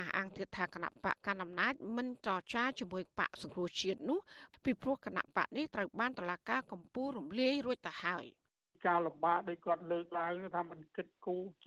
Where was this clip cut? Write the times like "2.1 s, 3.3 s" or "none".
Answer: none